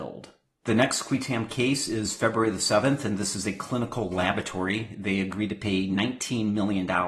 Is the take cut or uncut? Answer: uncut